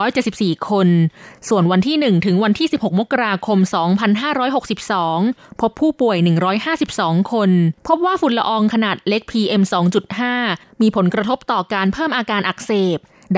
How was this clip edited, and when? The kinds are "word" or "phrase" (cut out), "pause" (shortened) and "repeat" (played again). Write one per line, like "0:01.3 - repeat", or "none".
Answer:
0:07.8 - pause